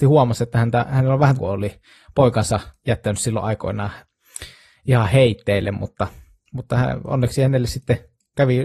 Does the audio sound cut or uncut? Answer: cut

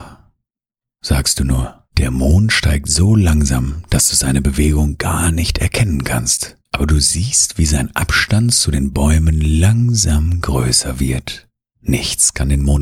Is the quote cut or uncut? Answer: cut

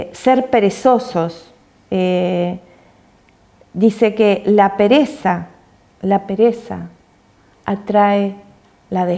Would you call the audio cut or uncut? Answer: uncut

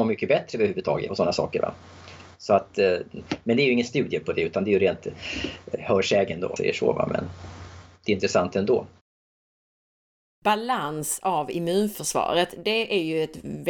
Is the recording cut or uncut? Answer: cut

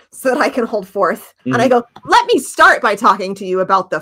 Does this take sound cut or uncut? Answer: cut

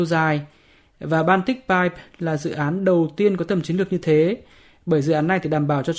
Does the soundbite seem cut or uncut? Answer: uncut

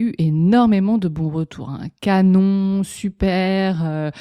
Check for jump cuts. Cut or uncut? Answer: uncut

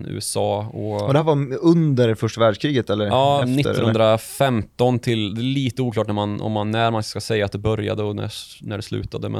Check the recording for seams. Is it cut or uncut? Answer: uncut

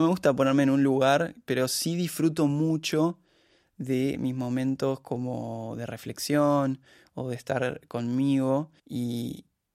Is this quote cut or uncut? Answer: cut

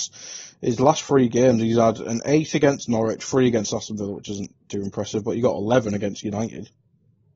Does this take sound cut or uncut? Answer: uncut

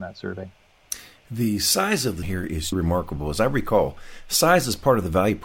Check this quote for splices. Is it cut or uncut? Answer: cut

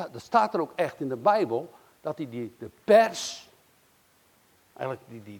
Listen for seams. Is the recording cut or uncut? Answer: uncut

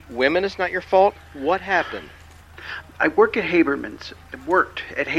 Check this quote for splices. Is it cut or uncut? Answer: uncut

